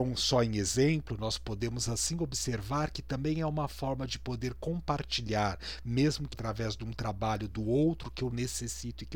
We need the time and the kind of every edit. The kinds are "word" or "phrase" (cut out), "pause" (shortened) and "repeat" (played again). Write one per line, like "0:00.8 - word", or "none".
0:06.3 - word